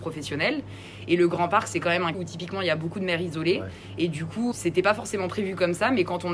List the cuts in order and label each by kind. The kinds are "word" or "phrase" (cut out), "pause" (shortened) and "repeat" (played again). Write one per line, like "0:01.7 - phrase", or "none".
0:02.1 - word
0:04.5 - word